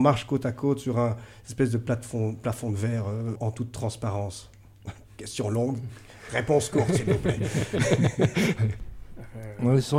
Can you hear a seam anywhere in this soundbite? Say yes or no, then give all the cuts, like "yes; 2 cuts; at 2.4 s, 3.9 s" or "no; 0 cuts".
yes; 1 cut; at 3.4 s